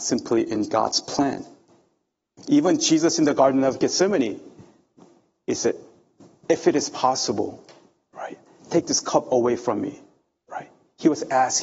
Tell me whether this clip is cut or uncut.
uncut